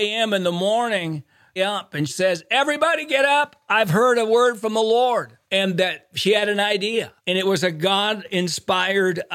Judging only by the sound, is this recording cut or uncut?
cut